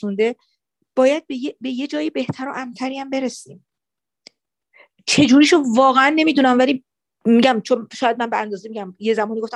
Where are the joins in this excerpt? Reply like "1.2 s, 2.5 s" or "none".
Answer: none